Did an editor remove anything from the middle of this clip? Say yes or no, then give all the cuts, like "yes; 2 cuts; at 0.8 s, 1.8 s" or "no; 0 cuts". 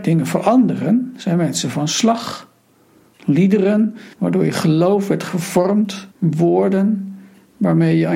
yes; 2 cuts; at 4.1 s, 6.1 s